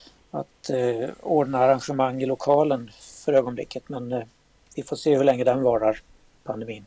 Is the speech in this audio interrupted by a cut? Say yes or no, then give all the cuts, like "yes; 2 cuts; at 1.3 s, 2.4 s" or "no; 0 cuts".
no; 0 cuts